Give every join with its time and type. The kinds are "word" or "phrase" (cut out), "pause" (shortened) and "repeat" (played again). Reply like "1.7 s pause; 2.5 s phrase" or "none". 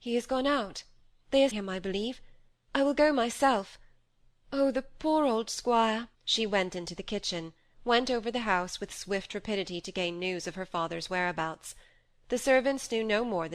1.5 s word; 6.1 s pause

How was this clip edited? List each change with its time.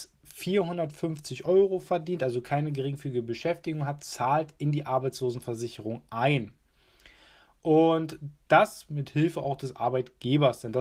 none

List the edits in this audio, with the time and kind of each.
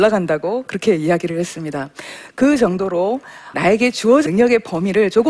3.5 s word; 4.3 s word

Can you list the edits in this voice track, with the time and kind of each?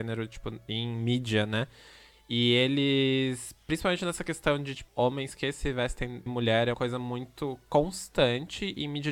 4.9 s word; 6.3 s word; 6.7 s word

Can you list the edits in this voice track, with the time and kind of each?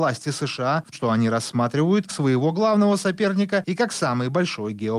0.9 s word; 2.1 s phrase

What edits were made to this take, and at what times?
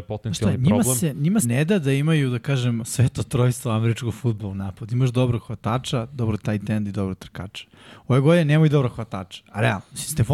1.4 s word; 2.8 s word

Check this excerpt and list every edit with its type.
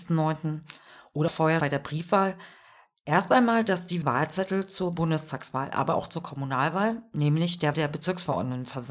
1.3 s word; 1.6 s word; 4.0 s word; 7.7 s word

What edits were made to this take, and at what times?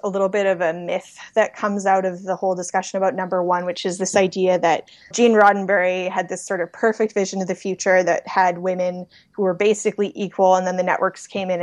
5.1 s word

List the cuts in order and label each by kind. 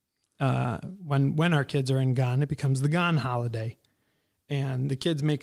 none

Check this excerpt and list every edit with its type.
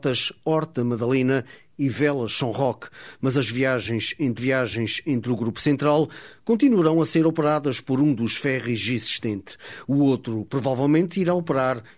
4.4 s repeat

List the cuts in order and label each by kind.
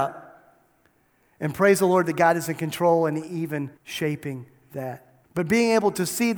3.8 s pause; 5.2 s pause

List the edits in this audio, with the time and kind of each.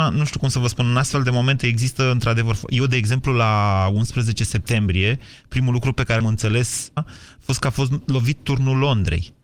6.2 s word; 7.0 s phrase

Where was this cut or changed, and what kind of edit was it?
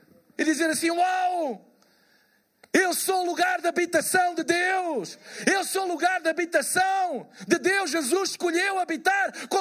none

